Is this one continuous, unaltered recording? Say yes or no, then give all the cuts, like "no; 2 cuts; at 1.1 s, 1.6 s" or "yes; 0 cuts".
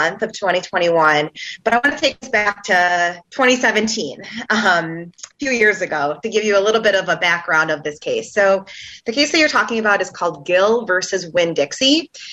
no; 1 cut; at 3.2 s